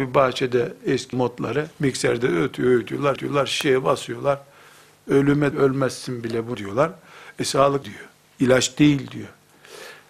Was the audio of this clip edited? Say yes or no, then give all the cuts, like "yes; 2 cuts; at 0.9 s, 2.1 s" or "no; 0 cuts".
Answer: yes; 7 cuts; at 1.1 s, 1.7 s, 3.2 s, 5.5 s, 6.5 s, 7.8 s, 8.2 s